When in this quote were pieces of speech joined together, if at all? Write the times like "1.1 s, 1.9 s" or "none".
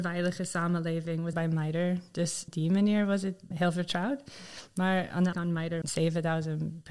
1.3 s, 2.5 s, 3.5 s, 5.3 s, 5.8 s